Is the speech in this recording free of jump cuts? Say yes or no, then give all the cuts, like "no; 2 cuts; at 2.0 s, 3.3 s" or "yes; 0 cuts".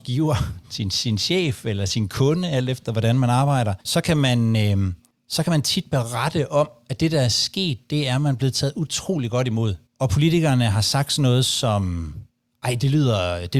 no; 3 cuts; at 3.8 s, 5.1 s, 9.9 s